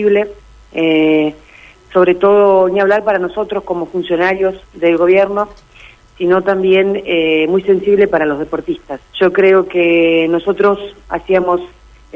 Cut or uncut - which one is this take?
cut